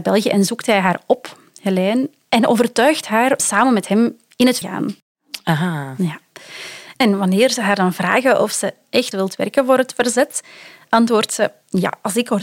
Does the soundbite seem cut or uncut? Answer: cut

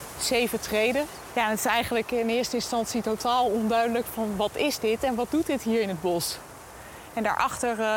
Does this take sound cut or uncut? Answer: uncut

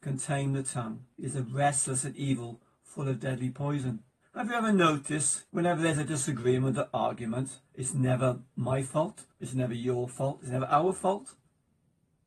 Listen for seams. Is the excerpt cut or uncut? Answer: cut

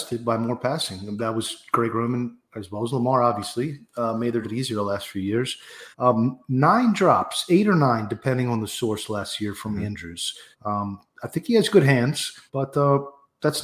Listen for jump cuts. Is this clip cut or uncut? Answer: cut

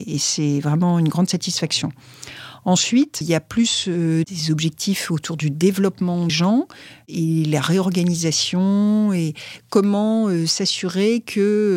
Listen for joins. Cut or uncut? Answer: cut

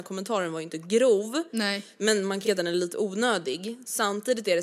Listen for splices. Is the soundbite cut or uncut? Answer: cut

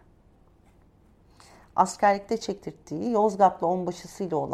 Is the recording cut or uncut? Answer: uncut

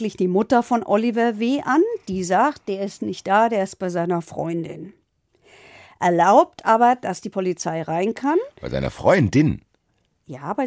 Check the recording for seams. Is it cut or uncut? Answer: uncut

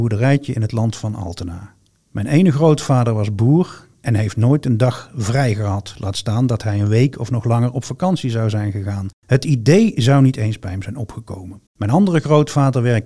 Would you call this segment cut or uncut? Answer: cut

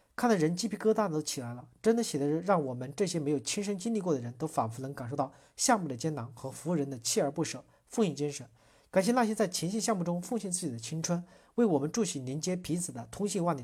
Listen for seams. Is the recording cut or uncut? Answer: uncut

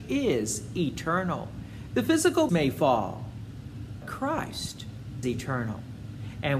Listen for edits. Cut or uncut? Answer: cut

